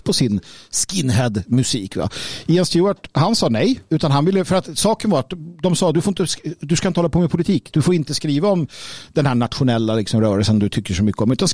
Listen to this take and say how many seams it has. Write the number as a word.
one